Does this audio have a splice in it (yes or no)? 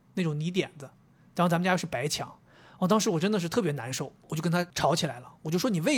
no